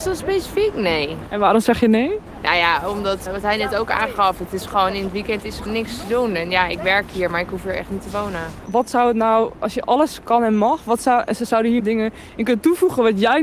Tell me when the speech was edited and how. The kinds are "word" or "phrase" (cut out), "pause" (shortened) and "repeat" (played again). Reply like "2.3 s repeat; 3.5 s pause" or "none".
3.3 s word; 5.7 s word; 9.8 s word; 11.8 s word